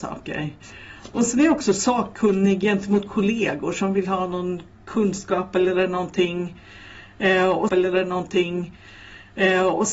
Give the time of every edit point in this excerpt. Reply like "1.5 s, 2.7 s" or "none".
7.7 s

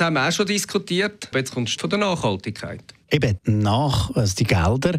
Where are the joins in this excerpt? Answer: 1.3 s, 1.8 s, 3.4 s

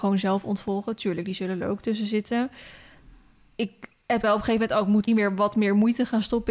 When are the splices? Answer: 4.2 s, 5.1 s

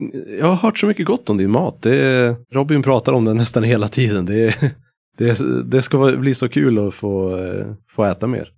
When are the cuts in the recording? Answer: 2.4 s

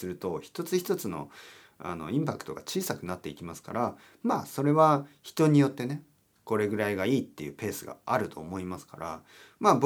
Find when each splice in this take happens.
none

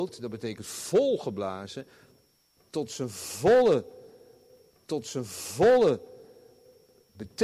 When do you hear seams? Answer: 4.7 s

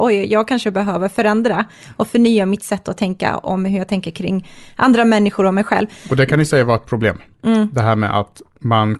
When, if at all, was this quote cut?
none

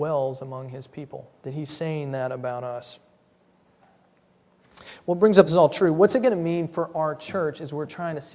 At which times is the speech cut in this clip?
1.4 s, 5.5 s

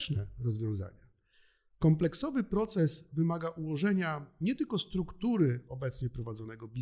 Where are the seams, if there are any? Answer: none

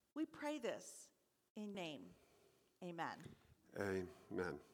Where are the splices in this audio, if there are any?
1.7 s

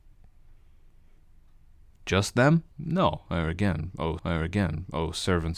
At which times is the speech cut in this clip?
2.7 s, 4.2 s

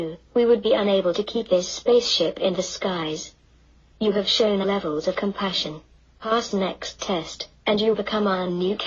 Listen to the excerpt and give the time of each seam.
4.6 s, 5.1 s, 6.5 s, 7.9 s

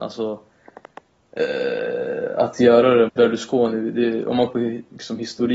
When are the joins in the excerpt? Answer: 3.1 s, 4.5 s

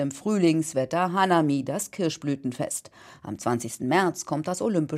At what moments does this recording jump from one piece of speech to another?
none

